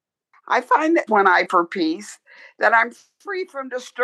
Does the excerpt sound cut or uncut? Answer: cut